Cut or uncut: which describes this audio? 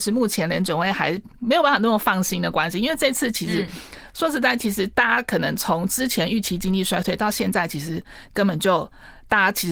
cut